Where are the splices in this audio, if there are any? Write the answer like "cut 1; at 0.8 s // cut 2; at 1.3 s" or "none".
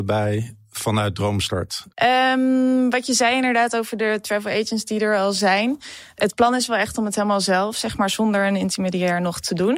cut 1; at 1.9 s